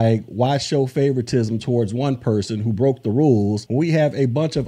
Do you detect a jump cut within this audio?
no; 0 cuts

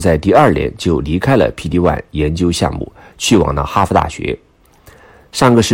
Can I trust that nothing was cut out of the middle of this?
yes; 0 cuts

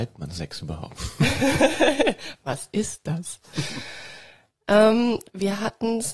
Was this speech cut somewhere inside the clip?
no; 0 cuts

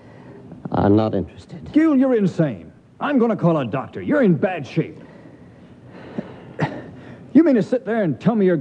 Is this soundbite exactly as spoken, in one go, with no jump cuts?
yes; 0 cuts

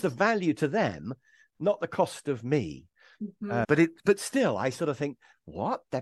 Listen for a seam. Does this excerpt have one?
no; 0 cuts

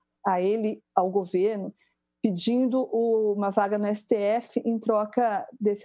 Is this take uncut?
yes; 0 cuts

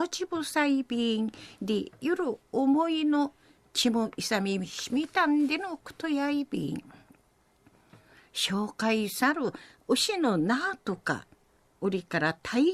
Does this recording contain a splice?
no; 0 cuts

